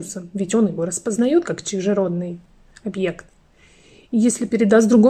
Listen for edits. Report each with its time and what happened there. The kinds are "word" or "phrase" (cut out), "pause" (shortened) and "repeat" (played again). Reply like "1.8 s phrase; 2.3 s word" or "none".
none